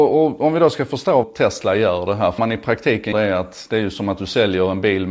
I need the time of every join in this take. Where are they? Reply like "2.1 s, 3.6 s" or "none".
1.2 s, 2.4 s, 3.1 s